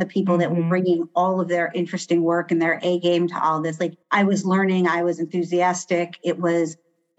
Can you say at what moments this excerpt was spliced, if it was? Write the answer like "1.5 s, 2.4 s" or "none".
4.0 s